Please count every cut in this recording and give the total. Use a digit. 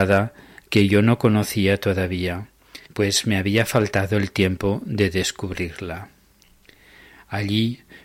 1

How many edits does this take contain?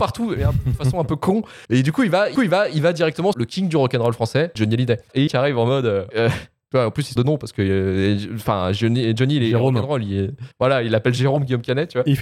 8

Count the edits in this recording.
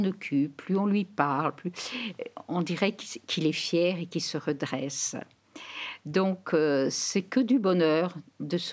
0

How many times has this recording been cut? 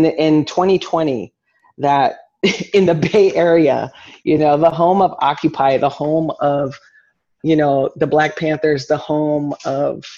0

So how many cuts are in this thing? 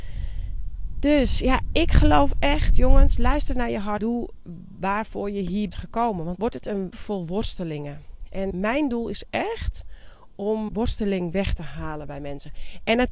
6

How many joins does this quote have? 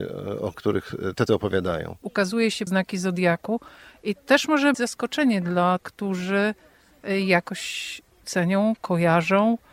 6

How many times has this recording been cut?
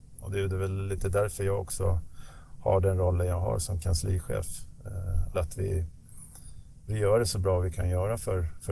2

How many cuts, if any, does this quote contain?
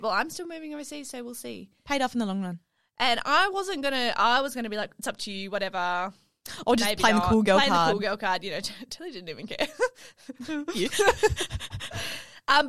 0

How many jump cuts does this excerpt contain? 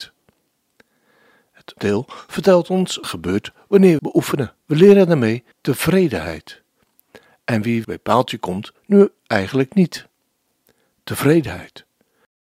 7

